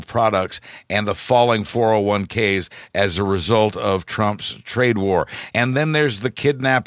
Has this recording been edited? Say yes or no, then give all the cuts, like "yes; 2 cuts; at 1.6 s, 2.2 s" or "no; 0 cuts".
no; 0 cuts